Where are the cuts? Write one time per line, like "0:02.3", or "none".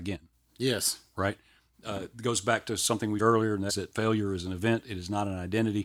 0:03.2
0:03.7

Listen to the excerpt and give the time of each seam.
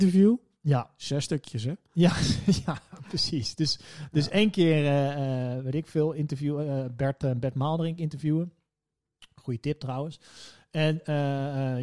none

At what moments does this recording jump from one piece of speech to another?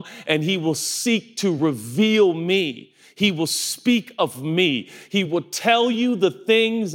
none

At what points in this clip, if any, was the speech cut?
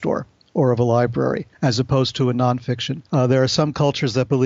0:01.5
0:03.1

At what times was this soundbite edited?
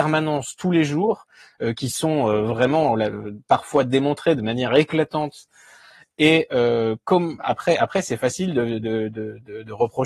none

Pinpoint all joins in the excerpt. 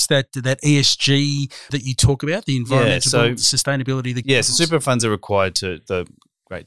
0:01.7
0:04.2

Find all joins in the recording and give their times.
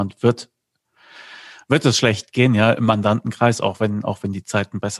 none

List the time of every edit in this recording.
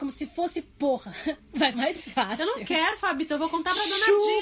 0:01.7

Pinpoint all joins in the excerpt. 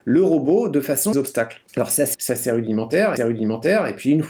0:01.1
0:01.7
0:02.1
0:03.2

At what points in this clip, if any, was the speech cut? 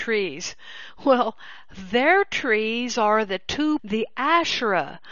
0:03.8

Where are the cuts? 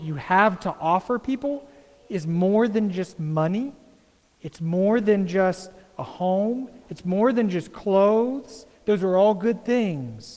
none

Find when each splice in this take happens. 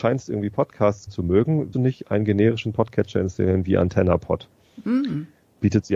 0:01.1
0:01.7

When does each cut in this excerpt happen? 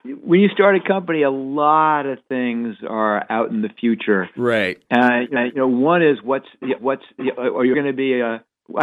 0:05.4
0:06.8
0:07.7

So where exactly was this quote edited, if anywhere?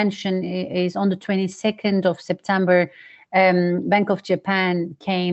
none

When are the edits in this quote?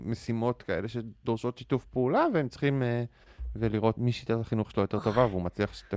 0:04.0

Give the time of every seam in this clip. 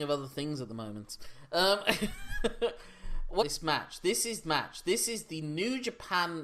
0:03.4
0:04.4

